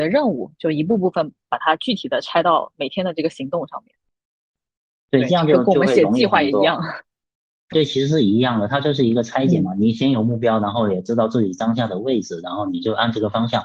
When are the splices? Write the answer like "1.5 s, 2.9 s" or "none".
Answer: 7.7 s

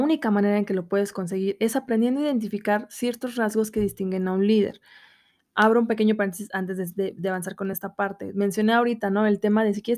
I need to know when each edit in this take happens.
none

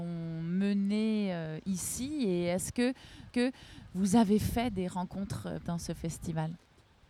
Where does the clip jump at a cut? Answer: 3.3 s, 5.6 s

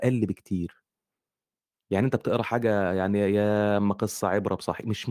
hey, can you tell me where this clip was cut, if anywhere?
none

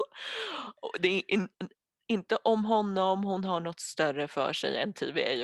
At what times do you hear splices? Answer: none

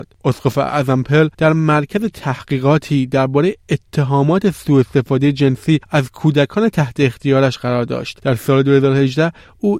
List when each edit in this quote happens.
1.3 s

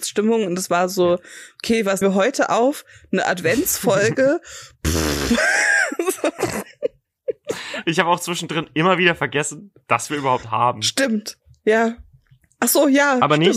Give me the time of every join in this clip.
2.0 s, 10.4 s

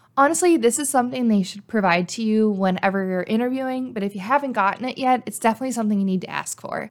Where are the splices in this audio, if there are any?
none

